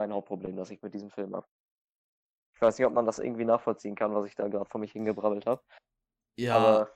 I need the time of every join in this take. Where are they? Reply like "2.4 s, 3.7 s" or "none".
none